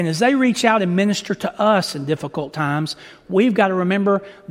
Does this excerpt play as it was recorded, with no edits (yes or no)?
yes